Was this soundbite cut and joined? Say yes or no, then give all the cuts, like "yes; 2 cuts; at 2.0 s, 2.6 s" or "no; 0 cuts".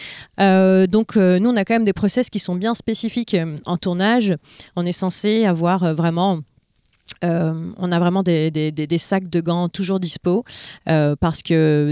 no; 0 cuts